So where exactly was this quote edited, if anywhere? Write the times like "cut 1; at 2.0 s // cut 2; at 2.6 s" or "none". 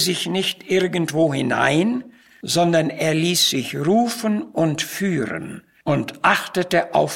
none

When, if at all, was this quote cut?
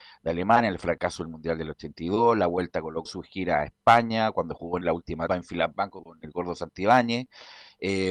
cut 1; at 3.1 s // cut 2; at 4.8 s // cut 3; at 5.3 s

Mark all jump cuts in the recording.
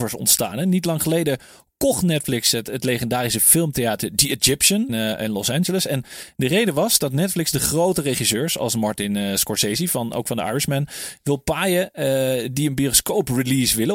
cut 1; at 4.9 s

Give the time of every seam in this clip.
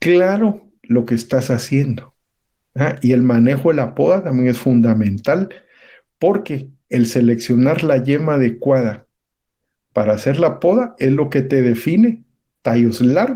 none

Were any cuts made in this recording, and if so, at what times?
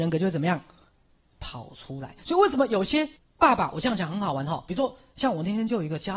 cut 1; at 3.2 s

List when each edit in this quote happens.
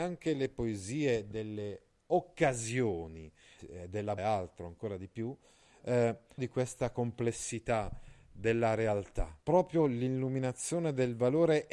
cut 1; at 3.6 s // cut 2; at 4.2 s // cut 3; at 6.4 s // cut 4; at 9.4 s

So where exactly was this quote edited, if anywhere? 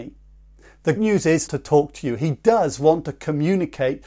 cut 1; at 1.0 s // cut 2; at 1.5 s

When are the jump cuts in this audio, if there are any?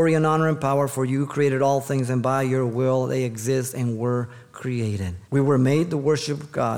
cut 1; at 5.2 s

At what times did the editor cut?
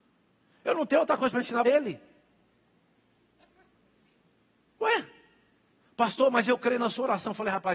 cut 1; at 1.6 s

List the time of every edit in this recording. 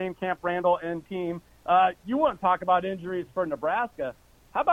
none

